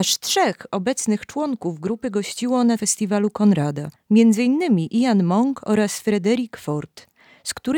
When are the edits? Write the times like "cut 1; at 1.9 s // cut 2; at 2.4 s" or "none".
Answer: cut 1; at 4.0 s